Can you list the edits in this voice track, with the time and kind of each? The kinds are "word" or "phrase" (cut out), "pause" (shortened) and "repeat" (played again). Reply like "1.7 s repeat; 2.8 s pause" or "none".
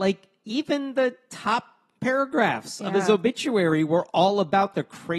none

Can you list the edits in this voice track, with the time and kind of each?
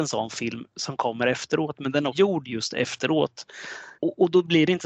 2.1 s word; 4.0 s pause

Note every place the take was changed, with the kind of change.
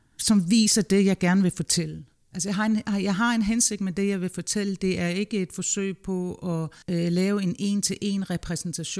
6.8 s pause

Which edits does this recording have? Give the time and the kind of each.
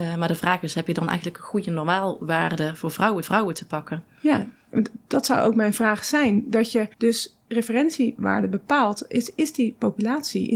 3.2 s repeat; 6.9 s pause

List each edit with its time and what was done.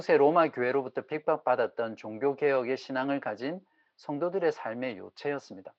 none

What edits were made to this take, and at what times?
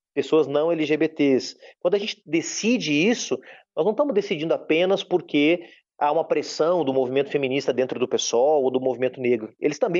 none

